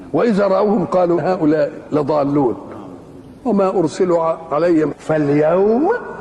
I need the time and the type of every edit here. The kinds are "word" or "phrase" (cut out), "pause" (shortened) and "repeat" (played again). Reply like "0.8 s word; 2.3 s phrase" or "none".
1.2 s word; 3.4 s pause; 4.9 s word